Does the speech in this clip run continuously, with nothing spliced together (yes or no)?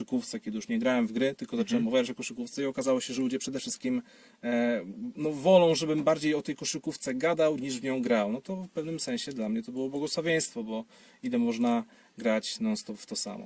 yes